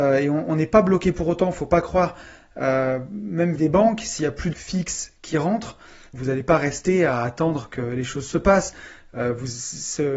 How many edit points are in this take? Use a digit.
3